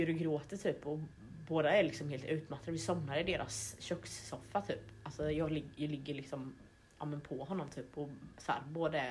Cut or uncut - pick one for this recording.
uncut